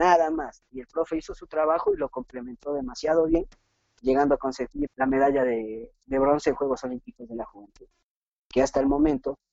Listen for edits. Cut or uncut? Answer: cut